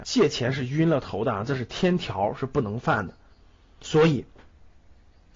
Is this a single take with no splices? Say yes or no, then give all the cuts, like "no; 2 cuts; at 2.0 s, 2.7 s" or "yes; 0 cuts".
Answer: yes; 0 cuts